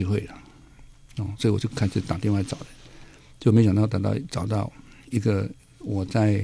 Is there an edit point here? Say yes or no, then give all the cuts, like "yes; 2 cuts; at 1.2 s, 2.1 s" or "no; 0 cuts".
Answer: no; 0 cuts